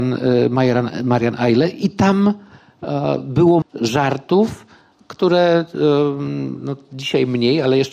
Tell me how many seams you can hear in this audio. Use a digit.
1